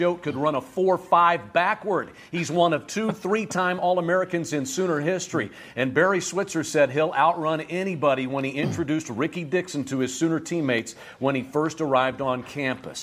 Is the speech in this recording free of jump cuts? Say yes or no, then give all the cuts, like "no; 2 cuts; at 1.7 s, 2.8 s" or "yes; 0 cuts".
yes; 0 cuts